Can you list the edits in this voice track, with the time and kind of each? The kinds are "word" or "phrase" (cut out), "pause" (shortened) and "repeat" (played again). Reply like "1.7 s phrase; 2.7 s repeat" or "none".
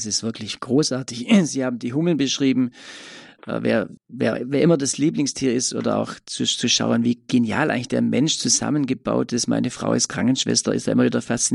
4.0 s pause